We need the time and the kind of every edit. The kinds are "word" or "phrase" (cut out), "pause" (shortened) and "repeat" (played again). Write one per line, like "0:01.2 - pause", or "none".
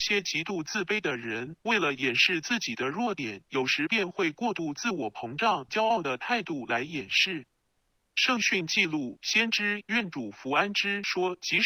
0:05.7 - phrase